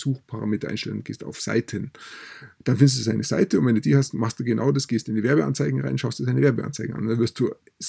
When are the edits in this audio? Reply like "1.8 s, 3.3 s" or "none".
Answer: none

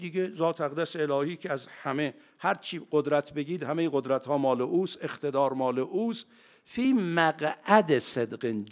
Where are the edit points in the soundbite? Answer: none

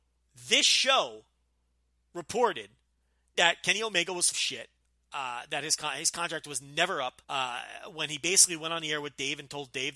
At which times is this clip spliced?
4.3 s, 7.2 s

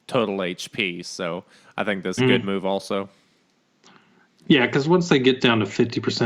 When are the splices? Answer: 2.2 s

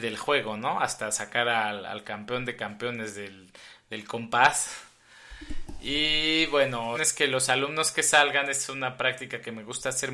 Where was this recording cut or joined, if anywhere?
6.9 s

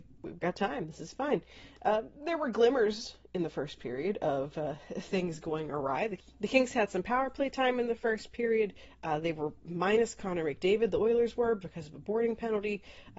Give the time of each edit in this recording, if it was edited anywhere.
none

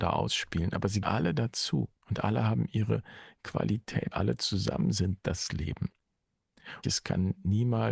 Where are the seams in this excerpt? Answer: 1.0 s, 2.0 s, 4.1 s, 6.8 s

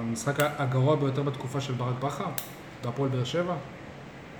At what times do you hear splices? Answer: none

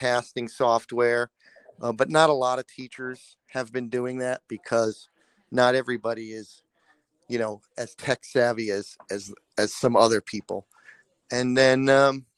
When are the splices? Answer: none

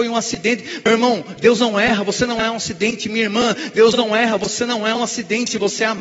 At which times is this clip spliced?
none

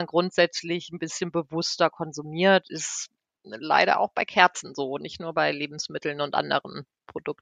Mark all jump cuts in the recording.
none

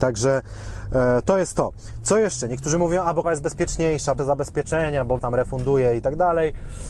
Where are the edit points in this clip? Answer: 3.2 s, 4.2 s, 5.2 s

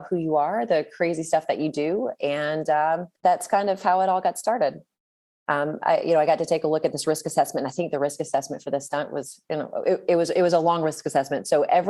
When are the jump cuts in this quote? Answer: 3.2 s

